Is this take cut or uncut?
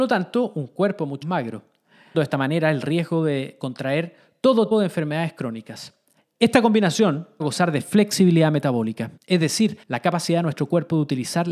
cut